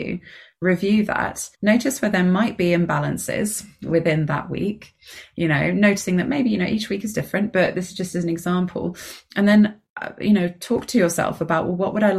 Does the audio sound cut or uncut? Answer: cut